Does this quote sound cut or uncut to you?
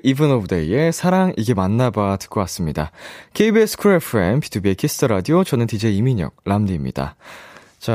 uncut